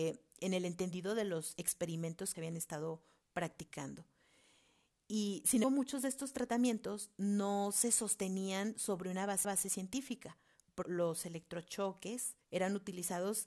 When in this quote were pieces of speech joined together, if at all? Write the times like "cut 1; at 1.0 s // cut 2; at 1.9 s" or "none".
cut 1; at 2.3 s // cut 2; at 5.6 s // cut 3; at 9.4 s // cut 4; at 10.8 s // cut 5; at 12.4 s